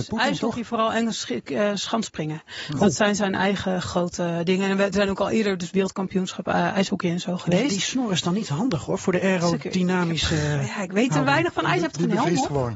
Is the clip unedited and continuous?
yes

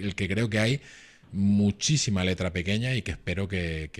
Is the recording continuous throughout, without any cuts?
yes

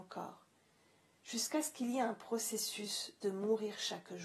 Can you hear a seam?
no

